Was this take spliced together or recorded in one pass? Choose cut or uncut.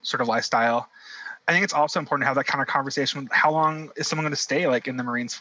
uncut